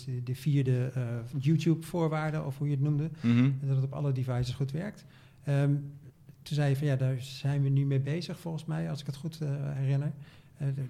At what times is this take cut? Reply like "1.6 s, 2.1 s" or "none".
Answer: none